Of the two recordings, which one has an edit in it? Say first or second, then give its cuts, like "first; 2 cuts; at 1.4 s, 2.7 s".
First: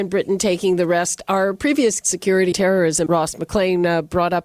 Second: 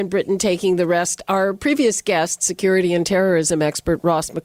first; 3 cuts; at 2.0 s, 2.5 s, 3.1 s